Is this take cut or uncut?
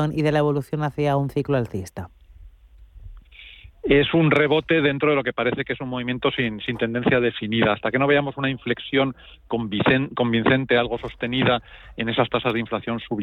uncut